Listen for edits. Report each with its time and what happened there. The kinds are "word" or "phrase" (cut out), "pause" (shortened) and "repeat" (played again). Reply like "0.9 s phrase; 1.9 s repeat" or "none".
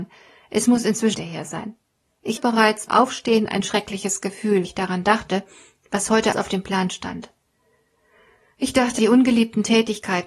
1.1 s word; 2.4 s word; 2.9 s word; 4.6 s word; 6.3 s word; 9.0 s word